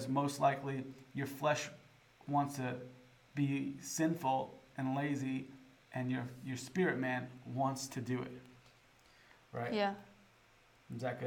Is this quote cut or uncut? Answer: uncut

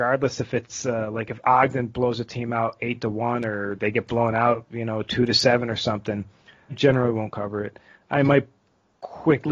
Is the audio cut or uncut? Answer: cut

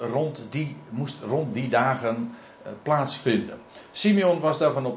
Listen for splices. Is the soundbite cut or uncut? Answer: uncut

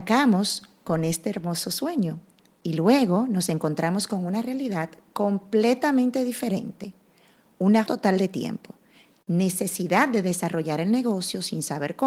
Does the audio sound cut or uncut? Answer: cut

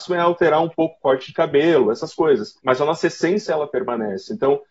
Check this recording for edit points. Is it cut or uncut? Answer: cut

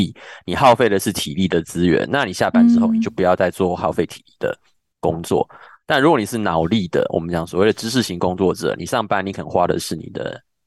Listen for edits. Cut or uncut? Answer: uncut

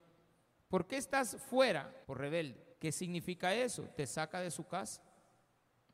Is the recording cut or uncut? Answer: cut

